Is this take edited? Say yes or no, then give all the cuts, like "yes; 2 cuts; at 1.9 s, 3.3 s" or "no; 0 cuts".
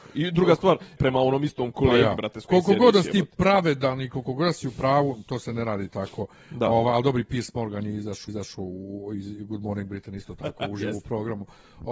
yes; 2 cuts; at 1.0 s, 8.3 s